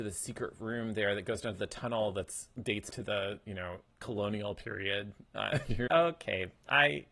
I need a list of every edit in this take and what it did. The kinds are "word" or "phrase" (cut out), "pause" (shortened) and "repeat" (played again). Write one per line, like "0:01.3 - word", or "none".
0:02.9 - word
0:04.0 - word
0:05.9 - word